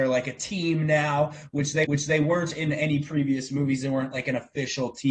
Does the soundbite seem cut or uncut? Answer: cut